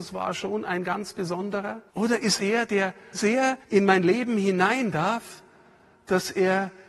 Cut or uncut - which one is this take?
cut